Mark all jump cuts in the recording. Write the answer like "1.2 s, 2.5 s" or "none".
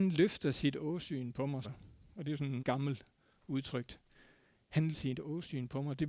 1.6 s, 2.6 s, 4.9 s

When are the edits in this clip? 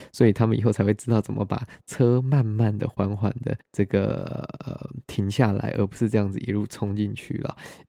3.6 s

